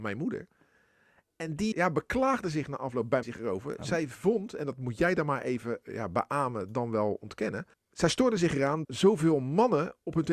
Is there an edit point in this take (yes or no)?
yes